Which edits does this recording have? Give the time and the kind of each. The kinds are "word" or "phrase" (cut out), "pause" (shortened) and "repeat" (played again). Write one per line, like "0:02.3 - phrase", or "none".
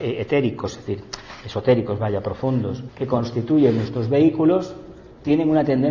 0:02.9 - word